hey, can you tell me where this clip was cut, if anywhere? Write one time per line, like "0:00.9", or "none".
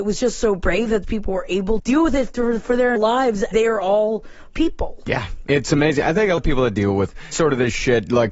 0:01.0
0:01.8
0:03.0
0:03.5
0:04.5
0:05.5
0:06.4
0:07.3